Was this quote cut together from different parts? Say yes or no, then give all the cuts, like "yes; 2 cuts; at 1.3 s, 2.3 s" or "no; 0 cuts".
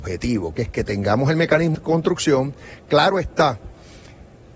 yes; 1 cut; at 1.7 s